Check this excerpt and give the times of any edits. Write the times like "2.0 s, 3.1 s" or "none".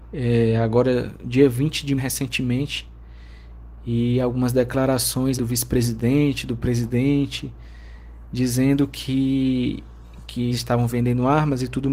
2.0 s, 5.4 s, 10.5 s